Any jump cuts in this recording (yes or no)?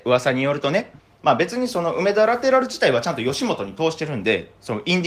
yes